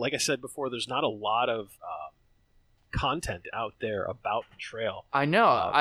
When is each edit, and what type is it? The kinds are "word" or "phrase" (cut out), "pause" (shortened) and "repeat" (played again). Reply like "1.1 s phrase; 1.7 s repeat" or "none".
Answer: 1.7 s pause